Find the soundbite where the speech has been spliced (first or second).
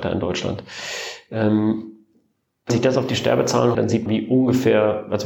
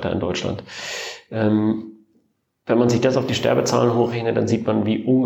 first